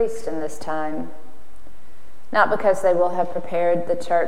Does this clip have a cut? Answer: no; 0 cuts

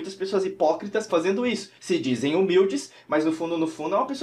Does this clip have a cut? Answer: yes; 2 cuts; at 1.1 s, 1.8 s

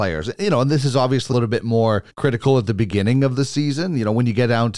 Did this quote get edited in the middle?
yes; 2 cuts; at 1.3 s, 2.1 s

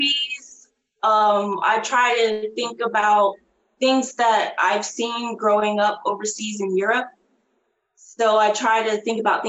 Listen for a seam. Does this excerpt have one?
no; 0 cuts

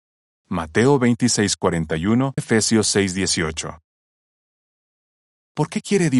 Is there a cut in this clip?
yes; 1 cut; at 2.4 s

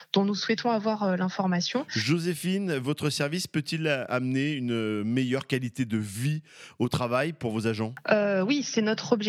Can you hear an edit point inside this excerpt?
no; 0 cuts

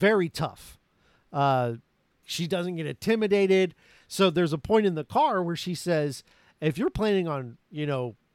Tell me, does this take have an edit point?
yes; 1 cut; at 2.2 s

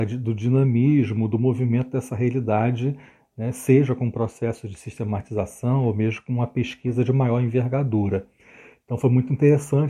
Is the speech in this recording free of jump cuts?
yes; 0 cuts

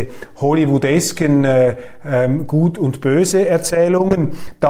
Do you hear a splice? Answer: no; 0 cuts

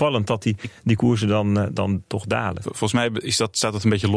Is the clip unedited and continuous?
yes; 0 cuts

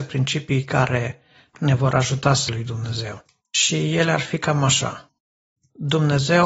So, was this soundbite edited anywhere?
yes; 1 cut; at 2.5 s

